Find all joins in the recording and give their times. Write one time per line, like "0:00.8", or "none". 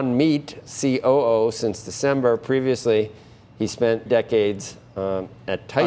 0:04.1